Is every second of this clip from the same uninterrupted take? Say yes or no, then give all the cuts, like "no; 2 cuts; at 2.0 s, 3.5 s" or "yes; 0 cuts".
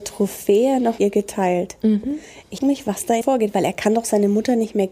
no; 3 cuts; at 1.0 s, 2.6 s, 3.2 s